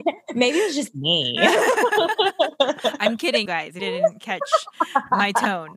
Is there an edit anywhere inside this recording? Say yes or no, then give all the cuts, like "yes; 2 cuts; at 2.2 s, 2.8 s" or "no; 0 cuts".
yes; 2 cuts; at 3.5 s, 3.8 s